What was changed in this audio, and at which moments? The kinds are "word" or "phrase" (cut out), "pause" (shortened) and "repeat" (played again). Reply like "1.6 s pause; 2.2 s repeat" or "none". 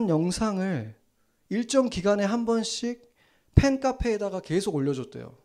none